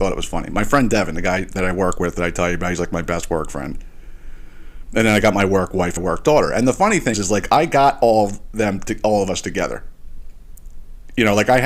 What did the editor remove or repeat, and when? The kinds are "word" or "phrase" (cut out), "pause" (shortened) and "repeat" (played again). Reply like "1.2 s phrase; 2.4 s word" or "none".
1.6 s phrase; 6.0 s word; 7.1 s word